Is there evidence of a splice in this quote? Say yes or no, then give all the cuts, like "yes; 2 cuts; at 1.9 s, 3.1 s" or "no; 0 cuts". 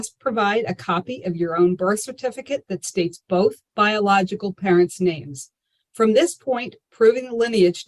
no; 0 cuts